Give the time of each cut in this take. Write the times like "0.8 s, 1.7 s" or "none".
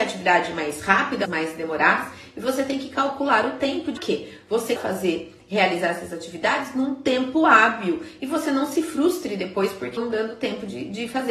1.2 s, 4.0 s, 4.8 s, 10.0 s